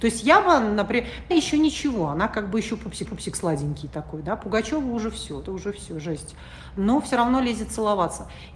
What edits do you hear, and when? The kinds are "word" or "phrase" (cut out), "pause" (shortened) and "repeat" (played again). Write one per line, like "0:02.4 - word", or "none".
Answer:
0:01.3 - word
0:03.1 - repeat
0:05.4 - word